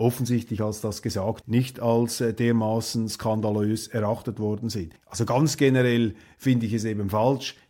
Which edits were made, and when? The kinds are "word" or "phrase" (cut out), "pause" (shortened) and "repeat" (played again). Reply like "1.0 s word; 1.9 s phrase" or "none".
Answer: 1.4 s word; 5.0 s pause